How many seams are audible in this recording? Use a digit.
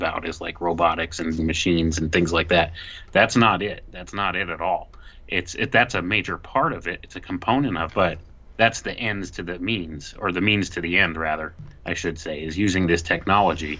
2